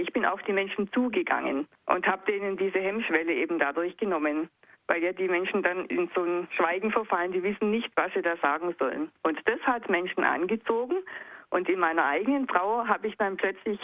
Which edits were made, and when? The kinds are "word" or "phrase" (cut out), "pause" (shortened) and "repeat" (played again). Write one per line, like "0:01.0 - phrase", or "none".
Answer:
none